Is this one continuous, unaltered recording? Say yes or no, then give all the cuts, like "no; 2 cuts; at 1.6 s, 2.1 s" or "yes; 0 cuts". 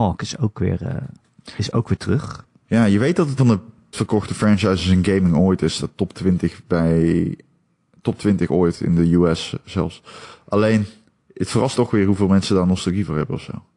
no; 3 cuts; at 3.4 s, 3.9 s, 11.7 s